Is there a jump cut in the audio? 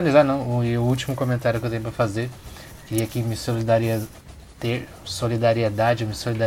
no; 0 cuts

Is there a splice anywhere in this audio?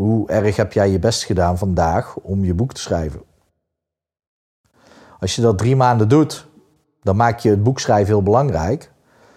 no; 0 cuts

